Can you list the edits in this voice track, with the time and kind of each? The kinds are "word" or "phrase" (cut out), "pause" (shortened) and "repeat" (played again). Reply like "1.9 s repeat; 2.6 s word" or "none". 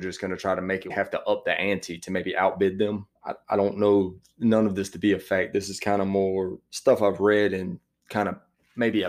0.9 s phrase; 3.2 s pause

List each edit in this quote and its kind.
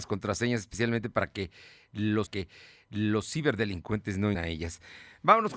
2.3 s repeat; 4.3 s word

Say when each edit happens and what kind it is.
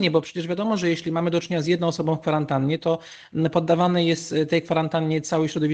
none

